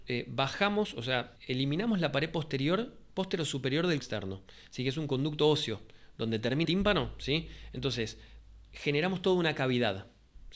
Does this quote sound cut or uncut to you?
cut